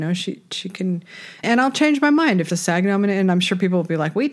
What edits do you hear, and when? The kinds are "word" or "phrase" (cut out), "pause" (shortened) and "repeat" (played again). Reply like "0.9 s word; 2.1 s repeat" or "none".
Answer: 1.4 s word; 2.5 s phrase